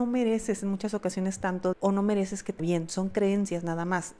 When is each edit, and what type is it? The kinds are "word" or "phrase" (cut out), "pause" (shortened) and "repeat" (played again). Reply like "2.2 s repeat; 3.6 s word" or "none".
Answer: 1.7 s word; 2.6 s word